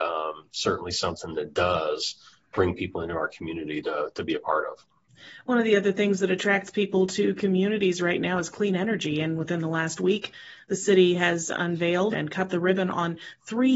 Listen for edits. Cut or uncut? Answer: cut